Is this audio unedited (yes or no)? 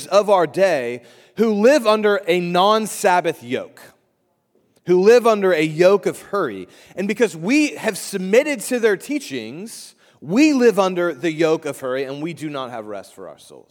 yes